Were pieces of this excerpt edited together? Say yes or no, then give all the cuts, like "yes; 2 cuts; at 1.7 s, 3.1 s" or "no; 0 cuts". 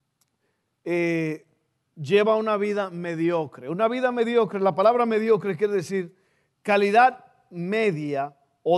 no; 0 cuts